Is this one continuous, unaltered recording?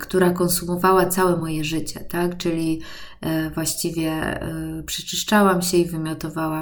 yes; 0 cuts

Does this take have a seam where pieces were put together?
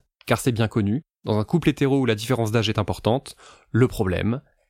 no; 0 cuts

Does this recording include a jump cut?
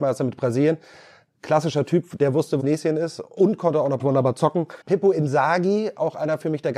yes; 3 cuts; at 2.6 s, 4.0 s, 4.8 s

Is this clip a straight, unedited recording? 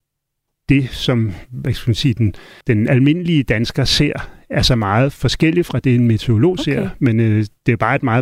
no; 1 cut; at 2.6 s

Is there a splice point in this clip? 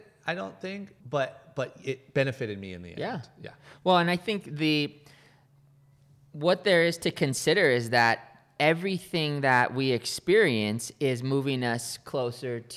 yes; 1 cut; at 1.0 s

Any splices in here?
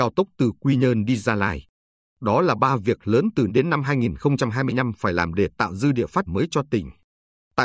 yes; 2 cuts; at 3.5 s, 6.3 s

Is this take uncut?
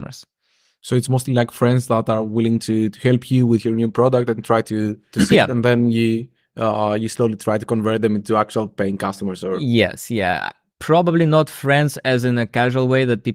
yes; 0 cuts

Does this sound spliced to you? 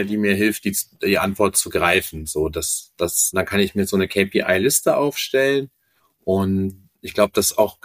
yes; 1 cut; at 7.0 s

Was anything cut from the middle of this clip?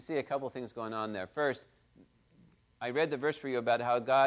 no; 0 cuts

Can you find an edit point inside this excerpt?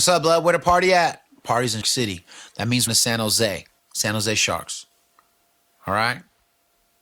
yes; 3 cuts; at 1.8 s, 2.9 s, 3.8 s

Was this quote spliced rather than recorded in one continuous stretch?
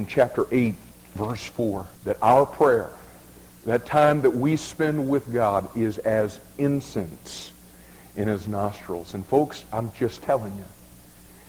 yes; 2 cuts; at 0.9 s, 2.0 s

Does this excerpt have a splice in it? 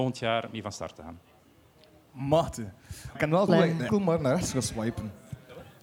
yes; 3 cuts; at 3.1 s, 3.5 s, 3.9 s

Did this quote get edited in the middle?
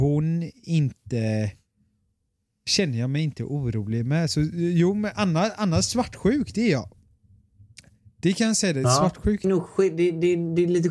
yes; 1 cut; at 9.4 s

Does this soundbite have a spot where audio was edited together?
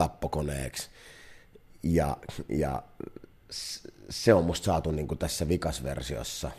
no; 0 cuts

